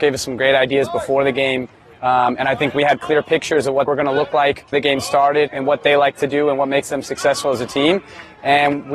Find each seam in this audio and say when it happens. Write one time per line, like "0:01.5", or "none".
0:03.0
0:03.9
0:04.7
0:05.5